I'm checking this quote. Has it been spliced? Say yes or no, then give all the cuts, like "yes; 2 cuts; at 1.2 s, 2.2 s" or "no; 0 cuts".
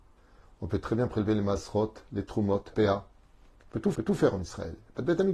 yes; 2 cuts; at 2.7 s, 3.9 s